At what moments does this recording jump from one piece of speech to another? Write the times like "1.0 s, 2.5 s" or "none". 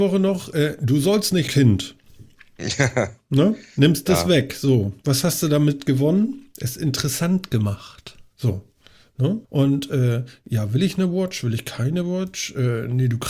1.5 s, 9.4 s